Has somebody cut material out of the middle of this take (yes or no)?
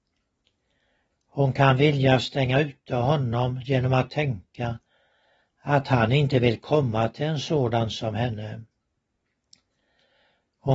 no